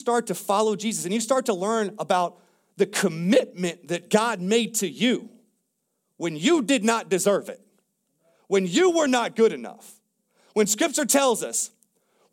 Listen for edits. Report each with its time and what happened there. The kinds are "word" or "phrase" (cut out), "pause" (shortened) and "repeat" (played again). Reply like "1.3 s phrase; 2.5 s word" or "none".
none